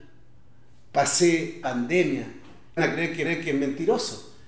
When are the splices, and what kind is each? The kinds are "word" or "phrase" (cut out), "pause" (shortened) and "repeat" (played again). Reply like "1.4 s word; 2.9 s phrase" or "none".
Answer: 1.6 s word; 2.8 s word; 3.2 s repeat